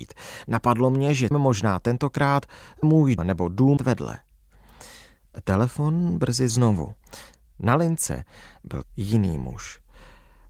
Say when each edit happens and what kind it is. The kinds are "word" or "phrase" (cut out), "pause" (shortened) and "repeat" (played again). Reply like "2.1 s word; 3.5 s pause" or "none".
1.3 s word; 2.8 s word; 3.2 s word; 3.8 s word; 6.5 s word; 8.8 s word